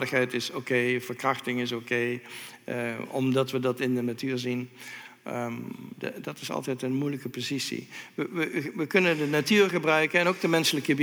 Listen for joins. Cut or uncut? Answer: uncut